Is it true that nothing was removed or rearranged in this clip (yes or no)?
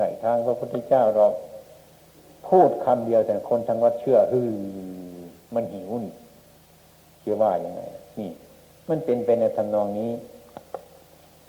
yes